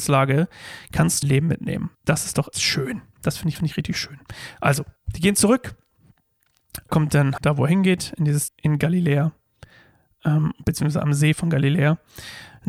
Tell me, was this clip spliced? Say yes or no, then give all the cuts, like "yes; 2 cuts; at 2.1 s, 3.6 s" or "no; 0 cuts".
yes; 8 cuts; at 1.2 s, 1.9 s, 2.5 s, 3.6 s, 5.0 s, 6.9 s, 7.4 s, 8.5 s